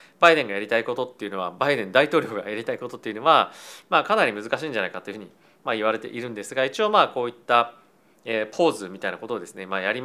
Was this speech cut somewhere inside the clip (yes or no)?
no